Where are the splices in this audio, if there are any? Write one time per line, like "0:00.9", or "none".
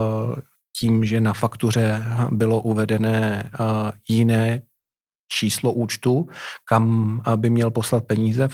none